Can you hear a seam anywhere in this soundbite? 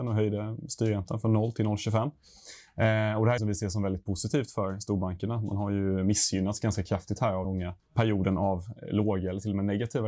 yes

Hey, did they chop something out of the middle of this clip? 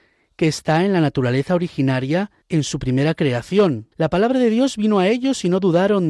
yes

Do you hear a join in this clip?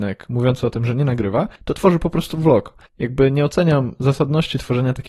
yes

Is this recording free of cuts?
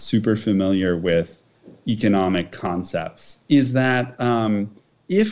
no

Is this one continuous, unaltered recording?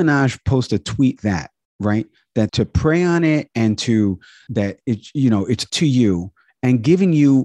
no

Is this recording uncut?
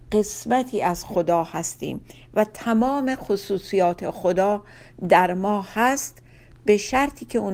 yes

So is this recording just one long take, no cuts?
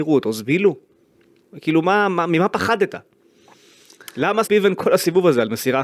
no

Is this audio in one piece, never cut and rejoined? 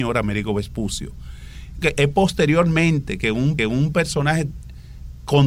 no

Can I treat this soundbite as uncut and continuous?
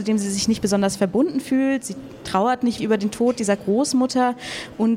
no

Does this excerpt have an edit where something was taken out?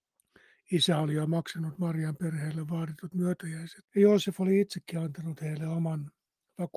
yes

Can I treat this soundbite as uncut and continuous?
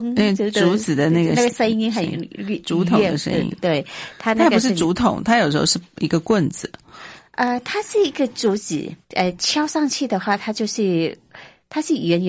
no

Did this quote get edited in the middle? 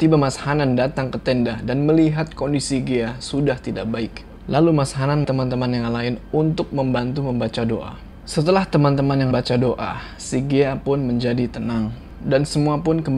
yes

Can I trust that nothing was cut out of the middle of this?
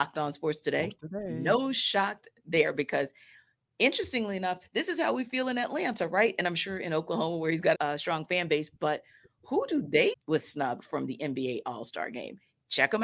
no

